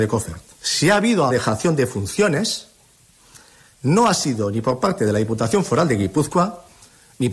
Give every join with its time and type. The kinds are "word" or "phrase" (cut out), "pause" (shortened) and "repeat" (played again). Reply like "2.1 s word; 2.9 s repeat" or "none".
1.3 s word